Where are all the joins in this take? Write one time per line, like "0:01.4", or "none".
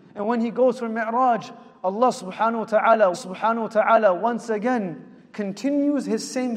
0:03.1